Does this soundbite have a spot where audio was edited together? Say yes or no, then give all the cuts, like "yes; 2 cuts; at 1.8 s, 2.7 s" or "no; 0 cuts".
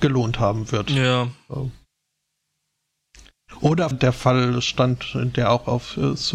yes; 1 cut; at 3.9 s